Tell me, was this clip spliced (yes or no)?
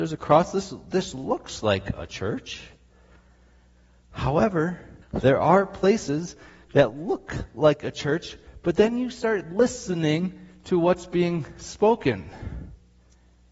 yes